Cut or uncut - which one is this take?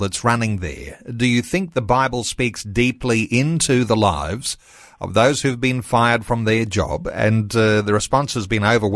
uncut